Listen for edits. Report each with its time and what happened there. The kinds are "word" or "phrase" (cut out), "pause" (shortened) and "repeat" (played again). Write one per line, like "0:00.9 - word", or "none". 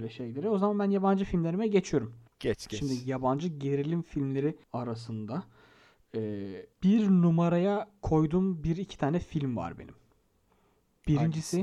0:02.3 - pause
0:04.6 - pause
0:06.7 - pause